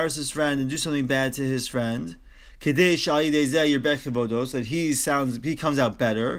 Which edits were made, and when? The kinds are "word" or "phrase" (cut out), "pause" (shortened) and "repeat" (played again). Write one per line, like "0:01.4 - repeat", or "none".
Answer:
none